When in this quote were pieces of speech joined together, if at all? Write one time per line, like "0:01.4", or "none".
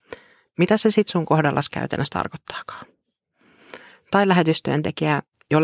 none